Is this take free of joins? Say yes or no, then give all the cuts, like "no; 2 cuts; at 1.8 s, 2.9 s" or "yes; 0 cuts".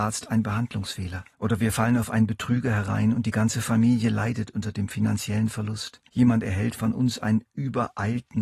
no; 2 cuts; at 1.3 s, 6.1 s